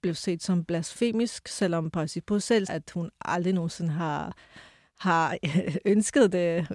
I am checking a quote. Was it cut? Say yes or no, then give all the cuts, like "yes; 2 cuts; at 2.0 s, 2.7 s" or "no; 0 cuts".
yes; 1 cut; at 2.7 s